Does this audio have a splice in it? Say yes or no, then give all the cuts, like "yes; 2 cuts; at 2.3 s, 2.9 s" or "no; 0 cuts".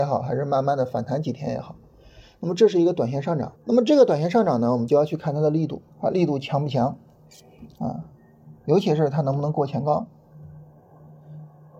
yes; 2 cuts; at 3.6 s, 5.9 s